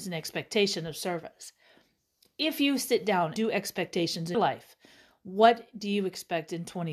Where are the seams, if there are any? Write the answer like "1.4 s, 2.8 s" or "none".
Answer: 3.4 s, 4.3 s